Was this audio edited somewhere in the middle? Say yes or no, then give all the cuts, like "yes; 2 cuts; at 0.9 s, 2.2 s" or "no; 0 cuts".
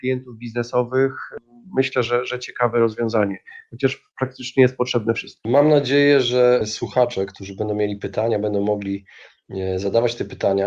no; 0 cuts